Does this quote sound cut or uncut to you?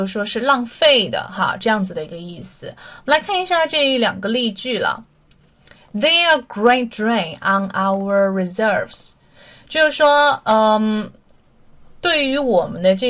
uncut